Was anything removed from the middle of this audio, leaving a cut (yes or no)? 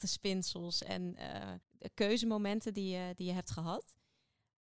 yes